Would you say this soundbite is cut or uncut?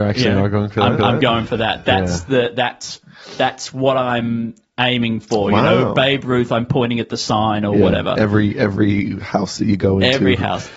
cut